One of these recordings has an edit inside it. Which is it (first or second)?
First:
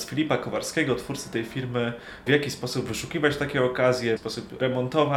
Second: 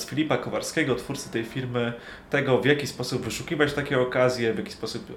first